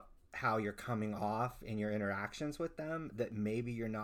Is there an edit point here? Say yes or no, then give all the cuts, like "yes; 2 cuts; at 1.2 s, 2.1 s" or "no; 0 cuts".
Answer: no; 0 cuts